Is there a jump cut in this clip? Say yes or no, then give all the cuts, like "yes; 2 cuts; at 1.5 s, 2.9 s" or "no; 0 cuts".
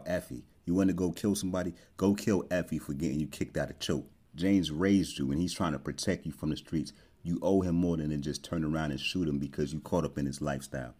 no; 0 cuts